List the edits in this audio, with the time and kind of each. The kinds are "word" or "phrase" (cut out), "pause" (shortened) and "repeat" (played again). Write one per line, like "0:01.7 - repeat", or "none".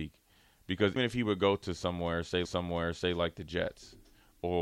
0:01.0 - word
0:02.4 - repeat